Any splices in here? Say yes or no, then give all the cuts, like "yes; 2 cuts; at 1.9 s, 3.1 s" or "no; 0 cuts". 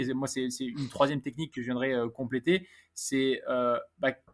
no; 0 cuts